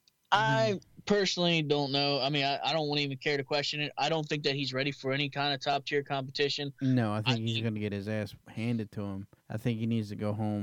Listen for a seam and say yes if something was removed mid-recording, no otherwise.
yes